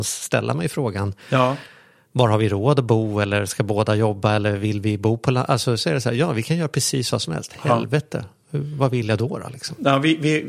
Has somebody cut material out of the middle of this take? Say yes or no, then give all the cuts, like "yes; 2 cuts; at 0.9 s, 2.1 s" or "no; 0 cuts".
no; 0 cuts